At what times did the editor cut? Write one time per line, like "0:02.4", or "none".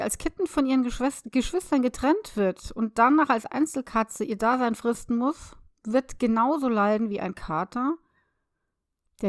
none